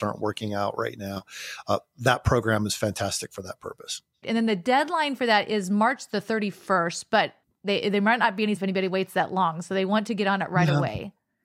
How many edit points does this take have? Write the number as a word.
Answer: three